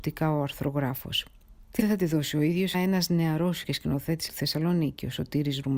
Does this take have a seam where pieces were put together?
yes; 4 cuts; at 1.8 s, 2.7 s, 3.6 s, 4.3 s

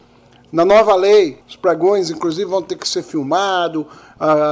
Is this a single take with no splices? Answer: no; 1 cut; at 1.4 s

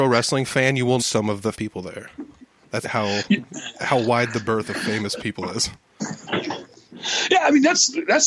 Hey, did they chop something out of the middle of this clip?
yes; 3 cuts; at 1.0 s, 1.5 s, 2.8 s

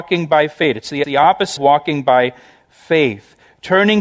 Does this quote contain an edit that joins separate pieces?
yes; 2 cuts; at 1.0 s, 1.6 s

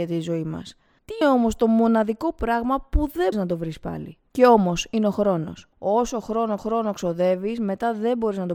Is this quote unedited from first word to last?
no; 5 cuts; at 1.2 s, 3.3 s, 4.3 s, 5.7 s, 6.6 s

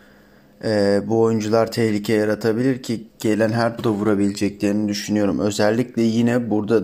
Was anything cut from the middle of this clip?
yes; 2 cuts; at 3.1 s, 3.8 s

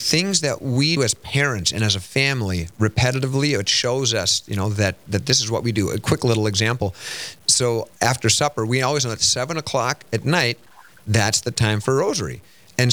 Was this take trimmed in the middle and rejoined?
yes; 2 cuts; at 1.0 s, 7.9 s

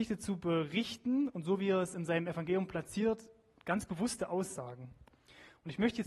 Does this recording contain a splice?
no; 0 cuts

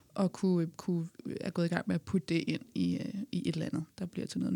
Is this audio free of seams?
yes; 0 cuts

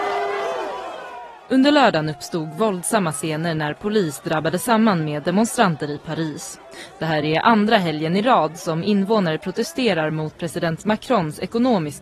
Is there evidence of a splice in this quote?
no; 0 cuts

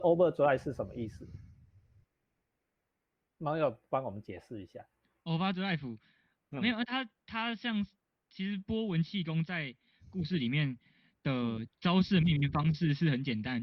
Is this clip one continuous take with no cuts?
yes; 0 cuts

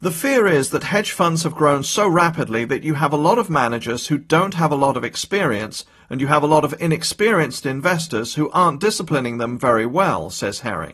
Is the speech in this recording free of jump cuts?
yes; 0 cuts

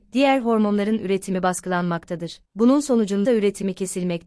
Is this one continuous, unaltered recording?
no; 2 cuts; at 2.4 s, 3.2 s

